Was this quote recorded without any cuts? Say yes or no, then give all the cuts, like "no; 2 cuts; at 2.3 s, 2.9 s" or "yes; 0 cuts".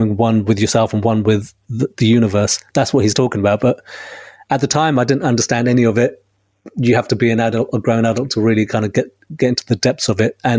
yes; 0 cuts